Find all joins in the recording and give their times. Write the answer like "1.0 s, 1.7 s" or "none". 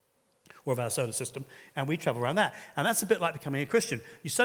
none